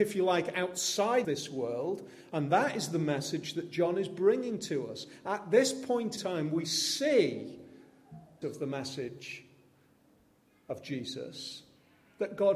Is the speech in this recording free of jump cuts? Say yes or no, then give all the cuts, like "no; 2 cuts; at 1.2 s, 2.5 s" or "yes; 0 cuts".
no; 3 cuts; at 1.2 s, 6.2 s, 8.4 s